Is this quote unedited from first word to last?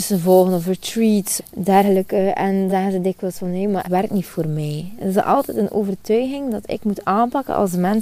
no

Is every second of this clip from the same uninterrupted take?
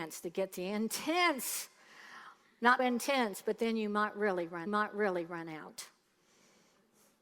no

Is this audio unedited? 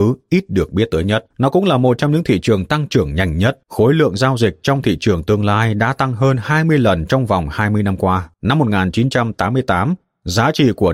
no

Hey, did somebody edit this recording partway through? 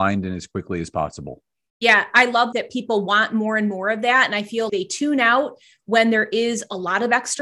yes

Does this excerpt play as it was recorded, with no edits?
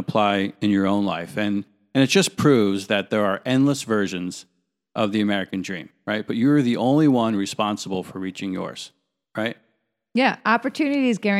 no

